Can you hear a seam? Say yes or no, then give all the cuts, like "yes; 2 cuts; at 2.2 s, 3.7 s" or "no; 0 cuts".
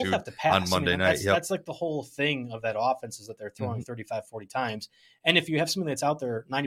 no; 0 cuts